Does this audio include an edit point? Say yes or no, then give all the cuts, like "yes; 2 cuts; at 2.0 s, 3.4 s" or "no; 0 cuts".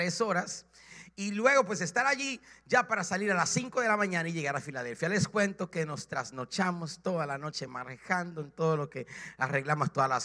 no; 0 cuts